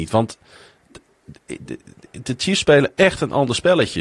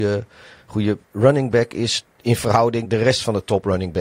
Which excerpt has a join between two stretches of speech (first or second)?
second